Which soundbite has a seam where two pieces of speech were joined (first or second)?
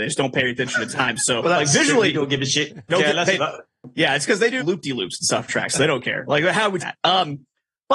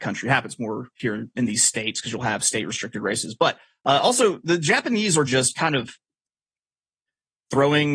first